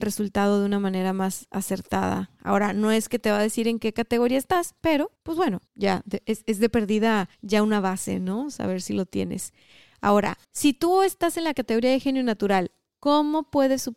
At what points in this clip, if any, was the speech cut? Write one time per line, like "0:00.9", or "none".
0:05.2
0:05.7
0:07.3
0:10.4